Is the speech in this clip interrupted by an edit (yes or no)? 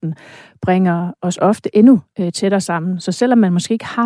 no